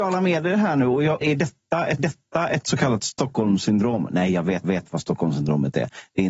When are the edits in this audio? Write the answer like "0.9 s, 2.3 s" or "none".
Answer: 1.2 s, 2.0 s, 4.6 s